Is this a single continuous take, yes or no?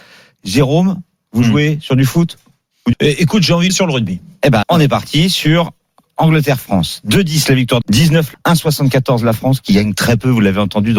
no